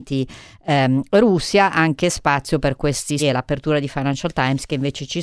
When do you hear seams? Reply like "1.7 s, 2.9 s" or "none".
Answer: 3.2 s